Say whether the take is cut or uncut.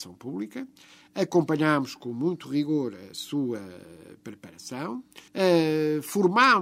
cut